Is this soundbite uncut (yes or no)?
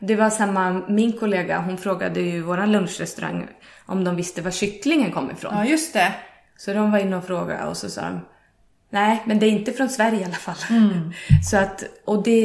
yes